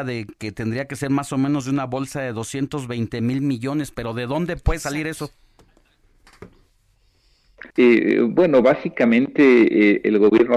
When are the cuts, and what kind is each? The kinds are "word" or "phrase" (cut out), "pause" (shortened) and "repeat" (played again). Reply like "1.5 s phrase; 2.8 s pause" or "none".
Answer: 7.7 s pause